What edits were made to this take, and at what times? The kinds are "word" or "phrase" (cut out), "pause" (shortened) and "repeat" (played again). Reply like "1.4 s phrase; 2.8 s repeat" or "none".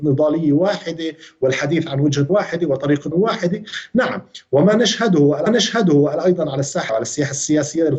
2.3 s word; 3.1 s word; 5.5 s repeat; 6.9 s word